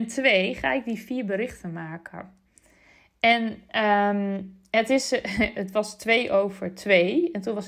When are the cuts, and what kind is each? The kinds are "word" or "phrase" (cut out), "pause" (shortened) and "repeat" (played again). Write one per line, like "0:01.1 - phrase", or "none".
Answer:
none